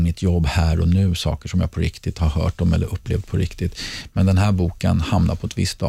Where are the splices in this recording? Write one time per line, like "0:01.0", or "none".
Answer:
none